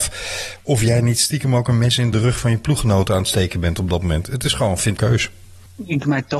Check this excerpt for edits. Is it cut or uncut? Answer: cut